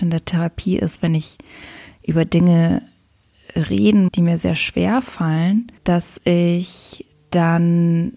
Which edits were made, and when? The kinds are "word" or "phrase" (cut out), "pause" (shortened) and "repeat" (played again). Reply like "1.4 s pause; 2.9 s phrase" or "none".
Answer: 4.1 s phrase; 5.8 s pause